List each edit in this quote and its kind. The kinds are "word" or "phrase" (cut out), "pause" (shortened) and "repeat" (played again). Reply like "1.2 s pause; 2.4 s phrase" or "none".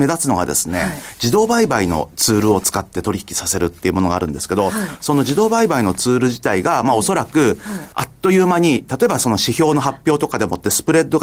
7.9 s pause